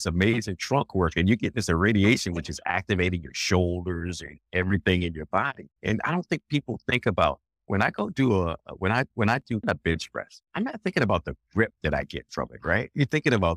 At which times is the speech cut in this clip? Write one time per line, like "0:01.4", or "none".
0:05.8
0:09.6
0:10.5